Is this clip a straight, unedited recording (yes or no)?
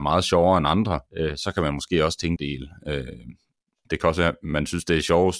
no